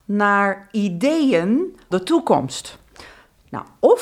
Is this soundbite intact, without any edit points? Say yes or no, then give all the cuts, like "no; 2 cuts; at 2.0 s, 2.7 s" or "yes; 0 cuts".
no; 1 cut; at 1.9 s